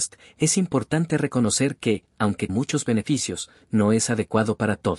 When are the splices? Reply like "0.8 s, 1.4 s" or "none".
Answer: 2.5 s